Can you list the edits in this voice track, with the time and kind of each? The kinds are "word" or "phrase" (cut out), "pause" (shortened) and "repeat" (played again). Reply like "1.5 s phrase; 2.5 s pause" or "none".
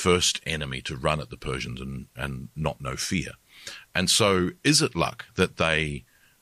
none